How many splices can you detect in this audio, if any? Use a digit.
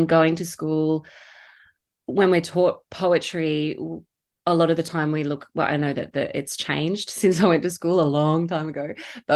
0